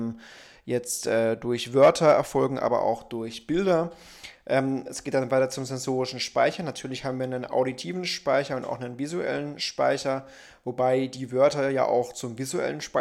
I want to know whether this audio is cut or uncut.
uncut